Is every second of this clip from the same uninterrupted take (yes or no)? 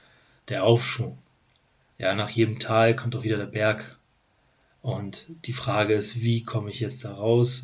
yes